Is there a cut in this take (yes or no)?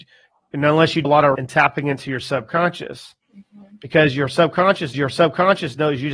yes